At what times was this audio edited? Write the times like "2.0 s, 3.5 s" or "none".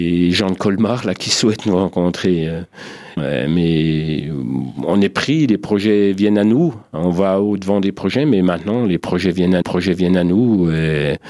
3.2 s, 9.6 s